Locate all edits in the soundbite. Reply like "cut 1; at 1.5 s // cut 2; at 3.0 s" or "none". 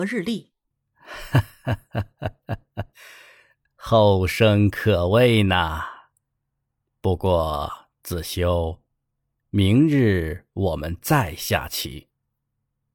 none